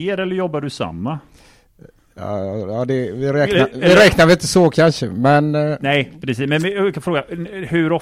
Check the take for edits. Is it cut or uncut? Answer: uncut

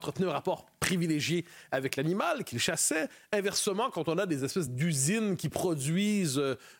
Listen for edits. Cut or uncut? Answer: uncut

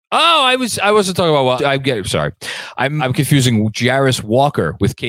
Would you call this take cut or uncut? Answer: cut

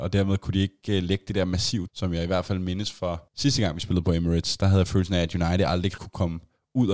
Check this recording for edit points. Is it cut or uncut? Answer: cut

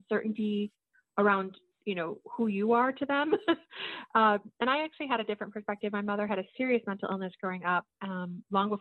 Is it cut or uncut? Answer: uncut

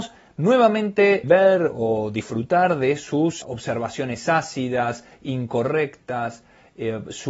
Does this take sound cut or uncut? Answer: cut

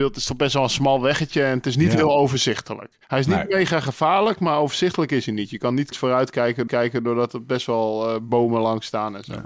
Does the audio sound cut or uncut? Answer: cut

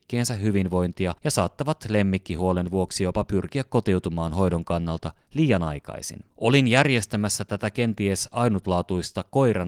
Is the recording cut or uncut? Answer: cut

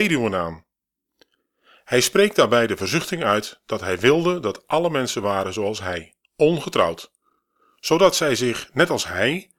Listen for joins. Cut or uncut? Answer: cut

